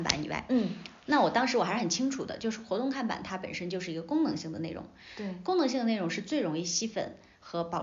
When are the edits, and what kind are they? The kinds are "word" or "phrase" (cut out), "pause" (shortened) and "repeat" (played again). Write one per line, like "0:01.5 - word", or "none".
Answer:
none